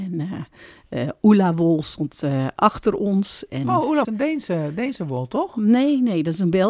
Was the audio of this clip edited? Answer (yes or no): yes